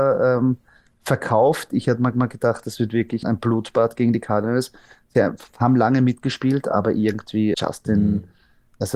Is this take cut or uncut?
cut